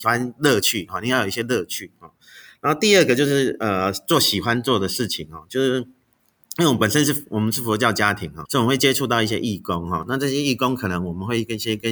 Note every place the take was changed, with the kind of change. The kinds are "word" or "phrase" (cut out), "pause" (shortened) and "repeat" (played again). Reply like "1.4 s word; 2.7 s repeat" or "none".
8.5 s word